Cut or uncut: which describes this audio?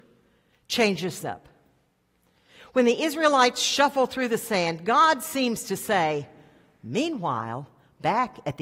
cut